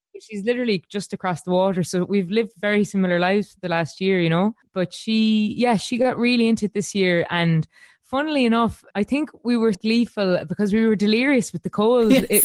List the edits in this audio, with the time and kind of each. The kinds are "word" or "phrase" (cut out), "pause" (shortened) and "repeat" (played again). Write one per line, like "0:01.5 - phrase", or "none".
0:08.9 - word
0:09.7 - word